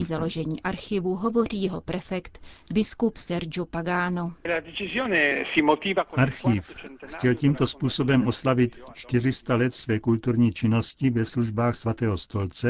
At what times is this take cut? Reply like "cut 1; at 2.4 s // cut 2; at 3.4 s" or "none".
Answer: none